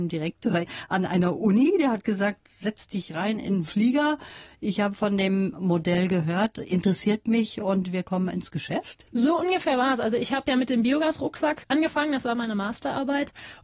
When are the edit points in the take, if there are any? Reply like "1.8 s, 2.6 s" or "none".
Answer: 9.1 s